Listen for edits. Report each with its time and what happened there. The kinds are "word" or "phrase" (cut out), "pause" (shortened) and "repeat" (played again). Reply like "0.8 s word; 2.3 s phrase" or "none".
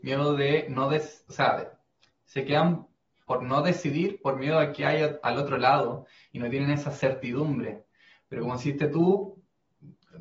none